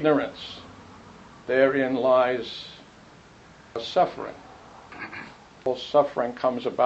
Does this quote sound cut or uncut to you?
uncut